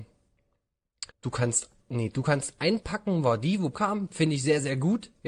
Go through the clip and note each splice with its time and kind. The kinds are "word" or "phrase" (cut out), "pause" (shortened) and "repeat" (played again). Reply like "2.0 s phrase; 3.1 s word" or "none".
1.1 s pause; 3.7 s word